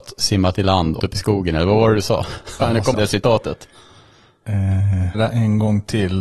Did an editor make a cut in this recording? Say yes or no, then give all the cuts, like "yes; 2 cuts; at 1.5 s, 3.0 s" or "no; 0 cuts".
yes; 4 cuts; at 1.0 s, 2.6 s, 2.9 s, 5.1 s